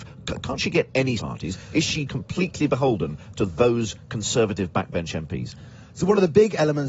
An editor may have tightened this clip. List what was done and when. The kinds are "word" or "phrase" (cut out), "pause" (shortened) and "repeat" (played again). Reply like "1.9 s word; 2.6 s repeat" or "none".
1.2 s phrase; 2.1 s word

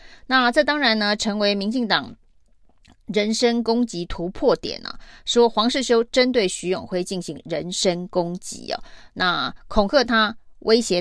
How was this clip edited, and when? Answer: none

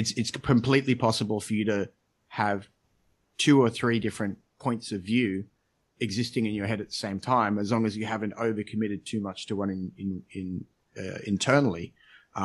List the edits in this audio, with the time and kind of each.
none

